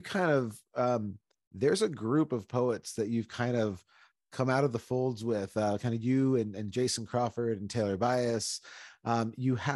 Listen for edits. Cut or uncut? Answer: uncut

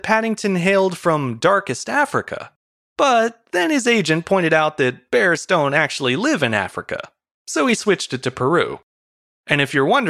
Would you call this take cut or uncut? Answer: uncut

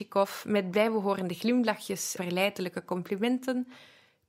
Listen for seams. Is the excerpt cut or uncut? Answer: cut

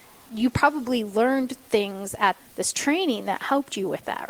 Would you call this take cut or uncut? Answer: cut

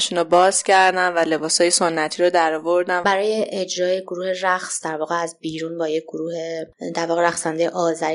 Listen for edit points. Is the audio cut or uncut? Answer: uncut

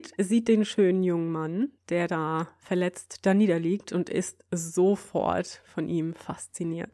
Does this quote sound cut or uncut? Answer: cut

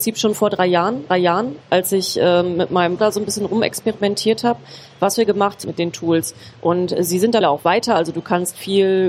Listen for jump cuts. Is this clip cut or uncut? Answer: cut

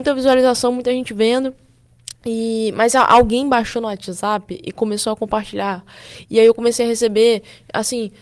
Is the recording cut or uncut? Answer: uncut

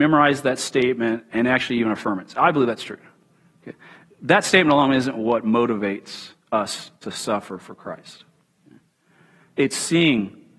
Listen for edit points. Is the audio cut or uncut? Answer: uncut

